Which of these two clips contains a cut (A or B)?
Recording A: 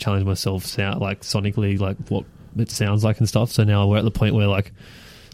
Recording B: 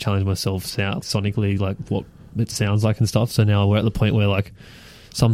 B